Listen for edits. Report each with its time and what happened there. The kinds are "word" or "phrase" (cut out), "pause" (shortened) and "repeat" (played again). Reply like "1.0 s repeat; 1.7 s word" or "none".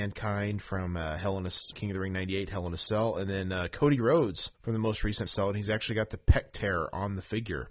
1.7 s phrase; 4.5 s pause; 5.3 s word